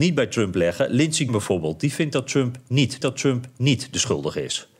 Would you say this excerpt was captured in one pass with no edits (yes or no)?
no